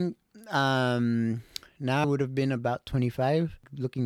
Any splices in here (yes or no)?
yes